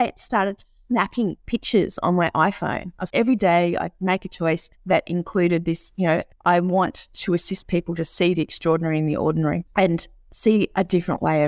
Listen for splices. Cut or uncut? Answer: cut